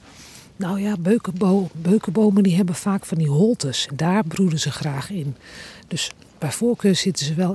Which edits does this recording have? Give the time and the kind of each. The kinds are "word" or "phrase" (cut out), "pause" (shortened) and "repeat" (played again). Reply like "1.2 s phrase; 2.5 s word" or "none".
3.9 s word